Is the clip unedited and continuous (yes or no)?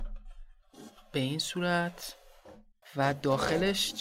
no